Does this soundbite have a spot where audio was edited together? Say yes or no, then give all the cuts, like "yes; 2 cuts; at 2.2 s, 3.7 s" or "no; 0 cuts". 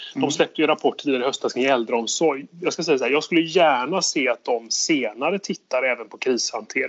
no; 0 cuts